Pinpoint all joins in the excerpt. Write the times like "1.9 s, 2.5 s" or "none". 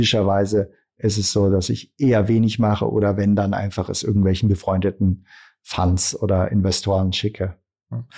none